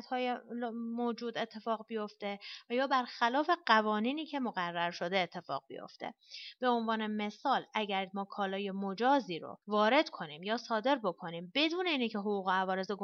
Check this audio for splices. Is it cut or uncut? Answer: cut